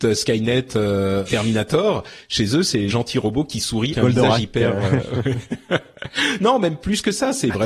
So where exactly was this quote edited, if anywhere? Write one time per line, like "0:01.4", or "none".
0:01.3
0:02.9
0:03.9